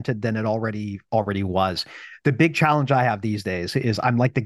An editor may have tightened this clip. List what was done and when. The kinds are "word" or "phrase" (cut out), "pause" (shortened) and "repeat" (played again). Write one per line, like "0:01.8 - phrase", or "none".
none